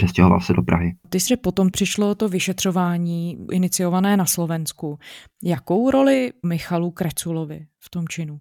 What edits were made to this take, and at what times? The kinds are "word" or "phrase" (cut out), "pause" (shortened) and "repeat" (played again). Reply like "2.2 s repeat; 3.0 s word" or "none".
1.3 s word; 1.7 s word; 3.5 s word; 6.4 s word